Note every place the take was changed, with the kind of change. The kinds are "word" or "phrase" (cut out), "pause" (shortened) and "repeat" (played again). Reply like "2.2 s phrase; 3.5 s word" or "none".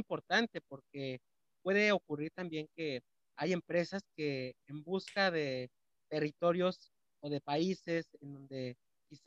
5.9 s word